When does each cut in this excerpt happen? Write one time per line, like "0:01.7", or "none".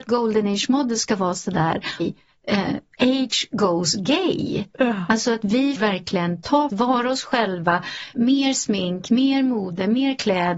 0:02.0
0:05.8
0:06.7
0:08.1